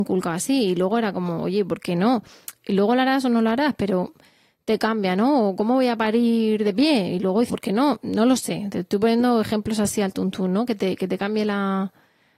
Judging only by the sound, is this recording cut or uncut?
cut